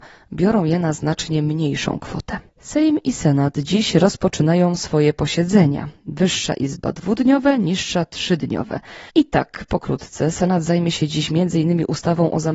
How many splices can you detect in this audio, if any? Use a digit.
2